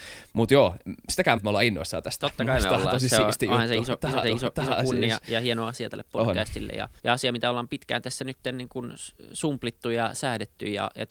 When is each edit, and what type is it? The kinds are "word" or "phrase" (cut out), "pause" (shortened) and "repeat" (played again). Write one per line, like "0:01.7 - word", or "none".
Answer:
0:01.4 - phrase
0:04.2 - repeat
0:07.0 - pause